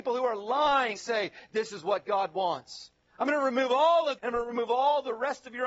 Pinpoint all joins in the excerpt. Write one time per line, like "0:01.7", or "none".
0:01.0
0:04.2